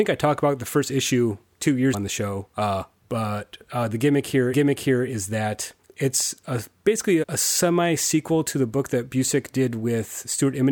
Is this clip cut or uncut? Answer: cut